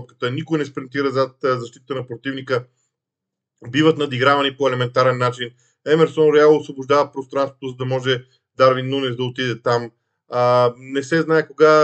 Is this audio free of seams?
yes; 0 cuts

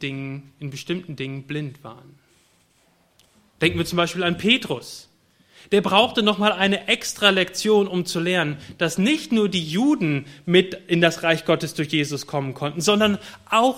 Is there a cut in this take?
no; 0 cuts

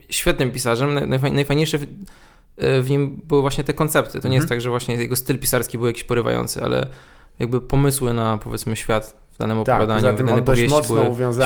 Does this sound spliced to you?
no; 0 cuts

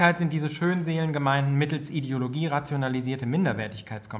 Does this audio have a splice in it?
no; 0 cuts

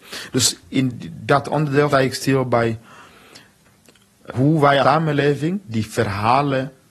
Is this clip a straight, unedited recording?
no; 3 cuts; at 1.9 s, 4.3 s, 4.8 s

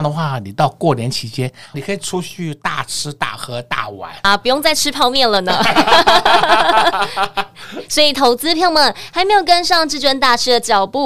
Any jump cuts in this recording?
yes; 2 cuts; at 1.7 s, 4.2 s

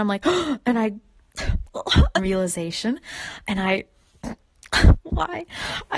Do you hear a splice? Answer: yes; 1 cut; at 2.1 s

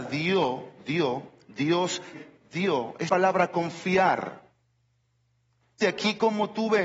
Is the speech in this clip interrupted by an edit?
yes; 3 cuts; at 2.1 s, 3.1 s, 5.8 s

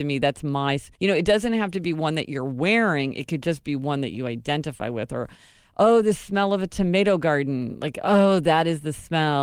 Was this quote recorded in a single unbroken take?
no; 1 cut; at 0.9 s

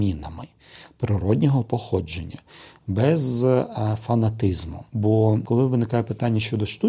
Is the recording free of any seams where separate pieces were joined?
yes; 0 cuts

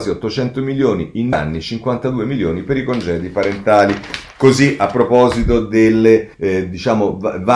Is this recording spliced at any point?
yes; 2 cuts; at 1.3 s, 6.3 s

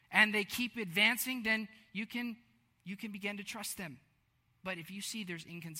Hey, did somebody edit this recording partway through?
no; 0 cuts

